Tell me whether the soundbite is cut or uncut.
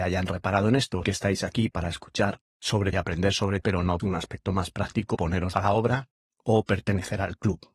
cut